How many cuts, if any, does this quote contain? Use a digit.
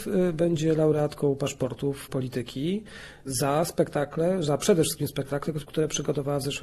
0